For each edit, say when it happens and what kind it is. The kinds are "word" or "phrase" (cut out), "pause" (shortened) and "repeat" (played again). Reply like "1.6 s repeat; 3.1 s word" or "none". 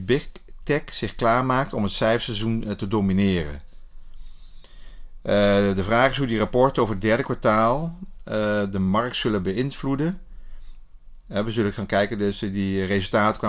none

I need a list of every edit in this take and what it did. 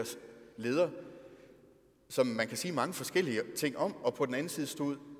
none

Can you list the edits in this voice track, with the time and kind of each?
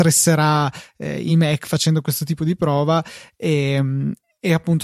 none

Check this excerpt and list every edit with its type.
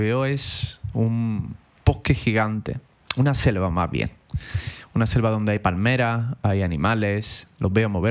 1.8 s pause

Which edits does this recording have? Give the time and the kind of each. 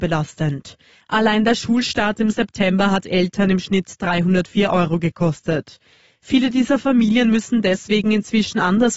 none

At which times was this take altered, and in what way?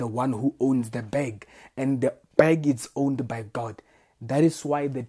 none

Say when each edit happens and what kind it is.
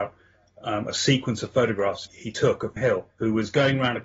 2.1 s word; 2.8 s word; 3.1 s pause

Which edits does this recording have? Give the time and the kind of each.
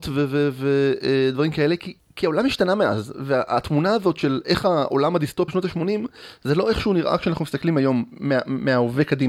2.0 s pause; 5.5 s phrase

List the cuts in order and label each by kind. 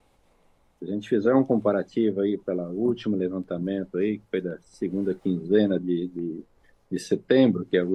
none

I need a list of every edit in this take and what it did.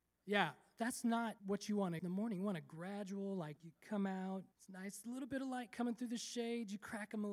1.4 s pause; 2.0 s word; 3.6 s word; 4.5 s pause

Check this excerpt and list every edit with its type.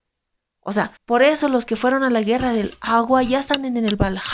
1.0 s pause

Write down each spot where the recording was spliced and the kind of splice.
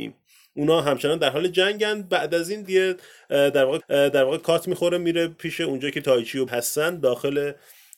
2.6 s word; 3.8 s repeat; 6.5 s word

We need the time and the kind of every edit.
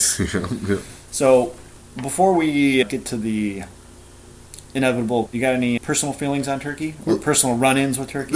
2.8 s word; 5.3 s word; 5.8 s word

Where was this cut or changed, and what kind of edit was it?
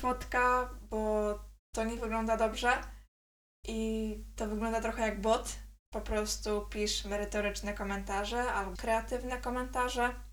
5.9 s word; 8.7 s word

